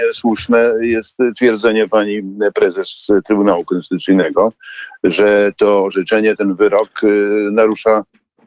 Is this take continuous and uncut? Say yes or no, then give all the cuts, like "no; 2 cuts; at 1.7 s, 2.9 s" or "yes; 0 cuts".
yes; 0 cuts